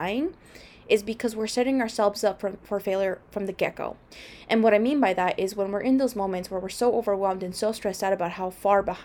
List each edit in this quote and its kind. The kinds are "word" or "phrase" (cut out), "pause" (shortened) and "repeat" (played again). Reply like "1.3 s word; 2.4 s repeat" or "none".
none